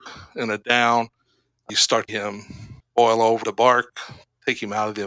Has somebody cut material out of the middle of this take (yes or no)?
yes